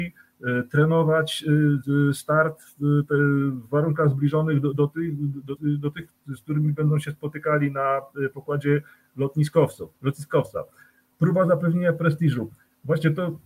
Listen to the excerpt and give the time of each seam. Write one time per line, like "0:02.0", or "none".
0:05.6
0:09.9

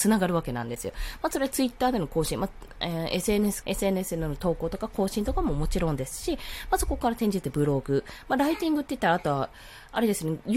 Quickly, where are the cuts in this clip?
0:03.6

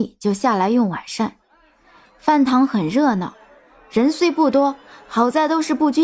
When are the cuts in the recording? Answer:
none

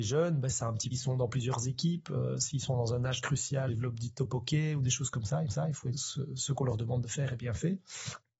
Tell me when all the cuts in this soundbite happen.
0:00.9
0:03.7
0:05.5
0:05.9

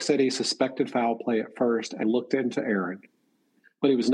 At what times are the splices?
0:02.0

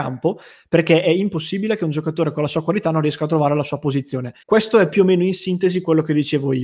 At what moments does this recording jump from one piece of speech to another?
0:04.4

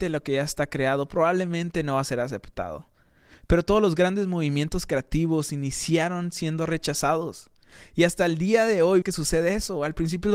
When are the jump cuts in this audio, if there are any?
0:09.0

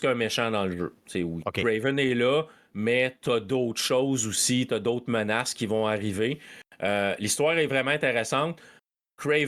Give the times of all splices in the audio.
none

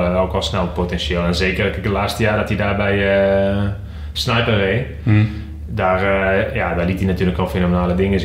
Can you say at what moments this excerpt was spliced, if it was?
none

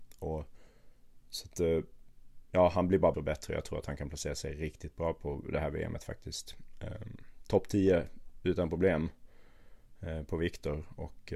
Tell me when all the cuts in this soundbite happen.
0:03.1

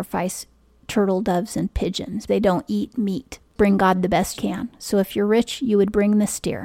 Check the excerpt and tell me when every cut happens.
0:02.3
0:04.3

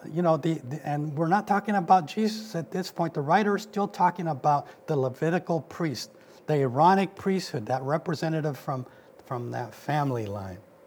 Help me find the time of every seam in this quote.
none

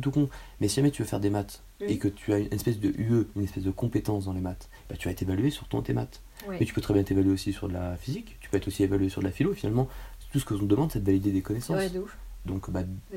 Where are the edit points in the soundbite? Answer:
none

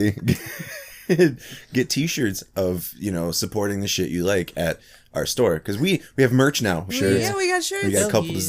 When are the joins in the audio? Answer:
0:06.9

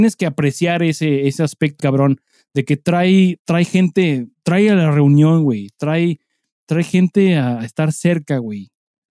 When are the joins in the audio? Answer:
0:01.8

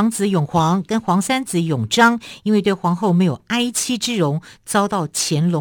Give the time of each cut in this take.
none

